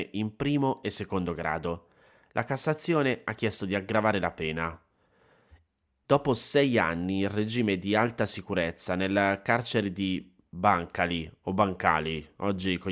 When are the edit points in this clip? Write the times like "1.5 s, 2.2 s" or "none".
none